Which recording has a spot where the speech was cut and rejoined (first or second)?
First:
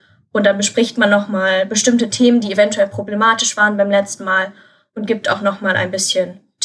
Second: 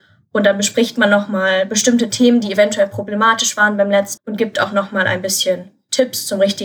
second